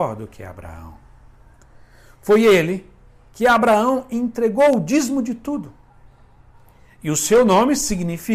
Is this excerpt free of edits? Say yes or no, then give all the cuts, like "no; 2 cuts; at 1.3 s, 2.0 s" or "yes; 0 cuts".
yes; 0 cuts